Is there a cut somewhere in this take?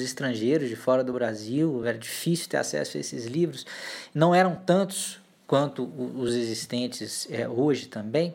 no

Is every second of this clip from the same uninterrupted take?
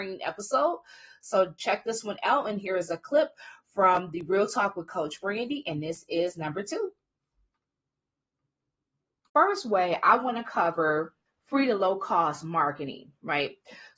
no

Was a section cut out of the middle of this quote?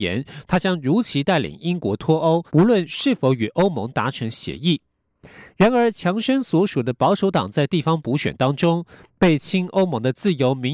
yes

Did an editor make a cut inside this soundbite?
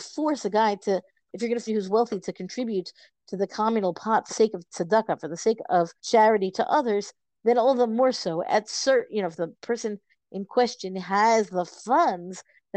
yes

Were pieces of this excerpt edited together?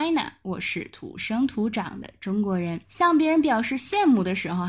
yes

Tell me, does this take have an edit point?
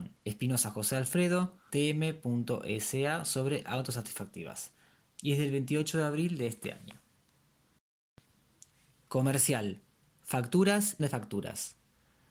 yes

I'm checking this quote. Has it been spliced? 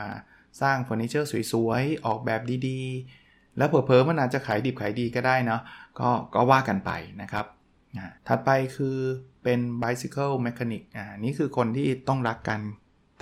yes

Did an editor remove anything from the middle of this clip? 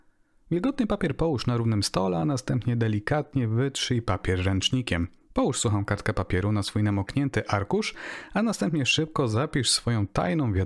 yes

